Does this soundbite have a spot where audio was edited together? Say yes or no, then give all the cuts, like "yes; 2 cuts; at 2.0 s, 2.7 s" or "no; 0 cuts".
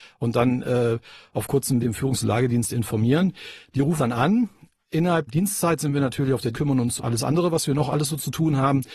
yes; 5 cuts; at 1.8 s, 4.0 s, 5.3 s, 6.5 s, 7.0 s